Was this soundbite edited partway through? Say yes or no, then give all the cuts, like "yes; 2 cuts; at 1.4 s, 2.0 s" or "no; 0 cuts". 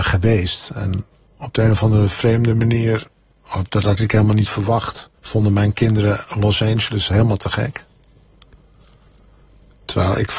yes; 1 cut; at 5.2 s